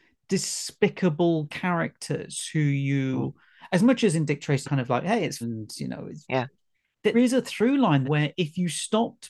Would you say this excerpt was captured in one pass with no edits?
no; 5 cuts; at 4.6 s, 5.4 s, 6.2 s, 7.1 s, 8.0 s

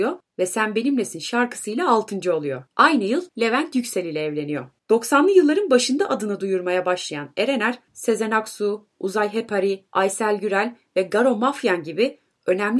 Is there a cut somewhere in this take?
yes; 4 cuts; at 2.7 s, 3.3 s, 4.8 s, 9.9 s

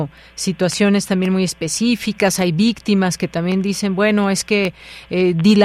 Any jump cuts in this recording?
no; 0 cuts

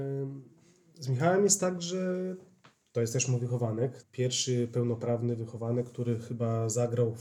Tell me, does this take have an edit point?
yes; 1 cut; at 4.0 s

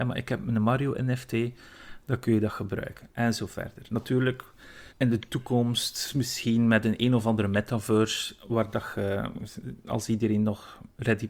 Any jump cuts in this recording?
yes; 1 cut; at 4.9 s

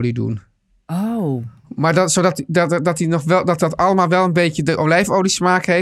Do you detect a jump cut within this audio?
no; 0 cuts

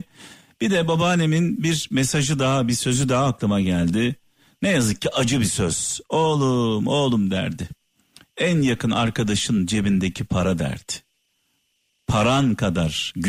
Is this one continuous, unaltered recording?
yes; 0 cuts

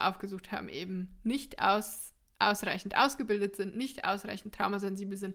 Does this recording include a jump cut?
no; 0 cuts

